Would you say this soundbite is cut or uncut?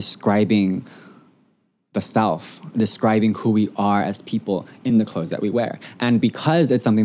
uncut